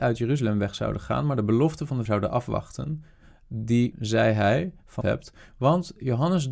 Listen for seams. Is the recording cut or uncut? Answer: cut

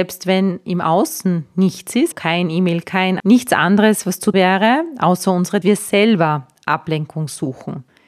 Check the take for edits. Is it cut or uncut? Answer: cut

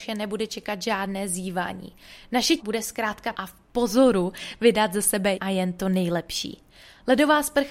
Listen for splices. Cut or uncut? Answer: cut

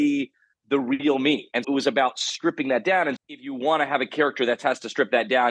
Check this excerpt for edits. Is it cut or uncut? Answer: cut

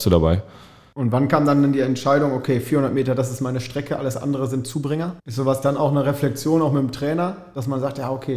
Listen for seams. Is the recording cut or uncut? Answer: cut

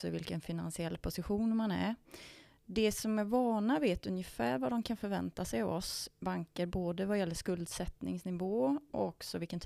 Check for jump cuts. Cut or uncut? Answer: uncut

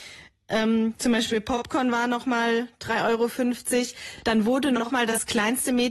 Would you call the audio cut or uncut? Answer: uncut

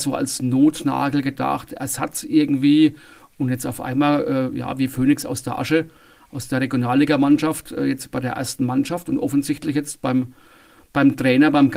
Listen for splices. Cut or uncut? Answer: uncut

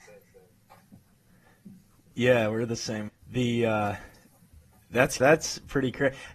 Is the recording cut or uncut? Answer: cut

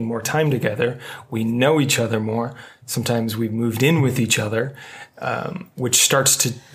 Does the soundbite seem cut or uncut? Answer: uncut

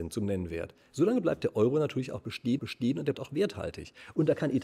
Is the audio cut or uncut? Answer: cut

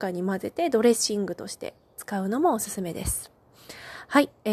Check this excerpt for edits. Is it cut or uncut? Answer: uncut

